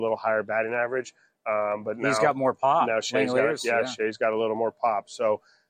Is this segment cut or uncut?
uncut